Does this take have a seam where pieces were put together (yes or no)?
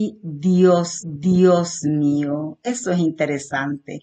yes